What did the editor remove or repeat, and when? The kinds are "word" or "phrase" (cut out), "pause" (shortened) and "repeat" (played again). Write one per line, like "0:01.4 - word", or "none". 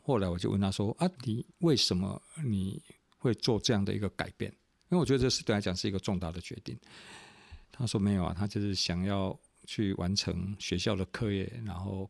0:01.2 - pause
0:07.6 - pause